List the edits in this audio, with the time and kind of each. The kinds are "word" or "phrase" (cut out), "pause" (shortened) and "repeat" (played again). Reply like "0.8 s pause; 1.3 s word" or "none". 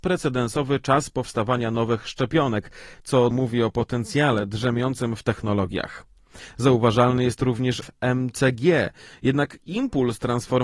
3.3 s word; 7.8 s phrase